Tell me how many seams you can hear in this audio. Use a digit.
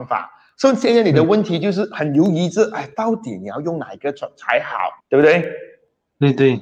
1